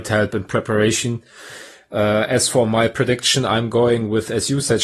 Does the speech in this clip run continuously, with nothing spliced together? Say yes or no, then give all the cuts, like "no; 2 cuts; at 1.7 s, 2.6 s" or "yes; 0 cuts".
yes; 0 cuts